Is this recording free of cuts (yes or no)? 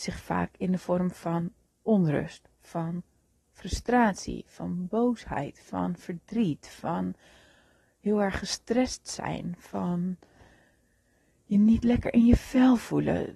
yes